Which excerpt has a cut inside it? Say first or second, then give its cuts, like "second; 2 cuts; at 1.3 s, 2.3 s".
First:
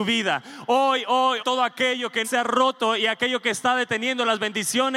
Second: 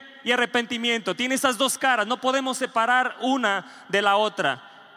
first; 2 cuts; at 1.4 s, 2.2 s